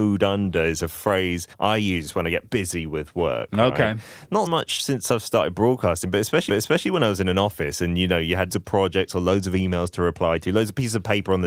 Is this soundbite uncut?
no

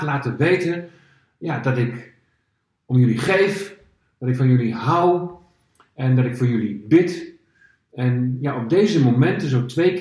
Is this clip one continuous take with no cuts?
yes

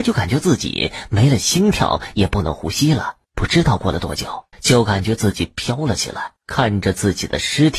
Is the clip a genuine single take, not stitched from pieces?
no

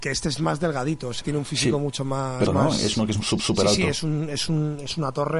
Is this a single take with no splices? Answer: no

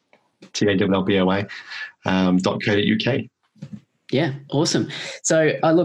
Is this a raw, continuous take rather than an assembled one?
yes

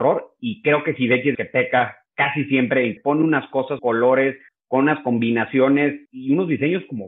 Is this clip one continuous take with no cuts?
no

